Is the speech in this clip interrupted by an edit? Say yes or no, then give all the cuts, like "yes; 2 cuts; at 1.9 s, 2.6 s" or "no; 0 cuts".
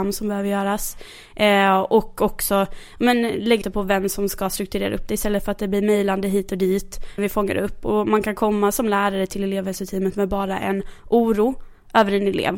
yes; 2 cuts; at 3.6 s, 7.2 s